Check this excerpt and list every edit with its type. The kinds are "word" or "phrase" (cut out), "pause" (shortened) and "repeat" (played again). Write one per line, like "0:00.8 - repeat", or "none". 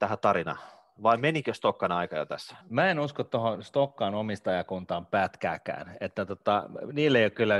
0:02.6 - pause